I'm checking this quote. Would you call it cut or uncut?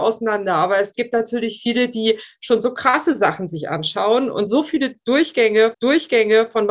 cut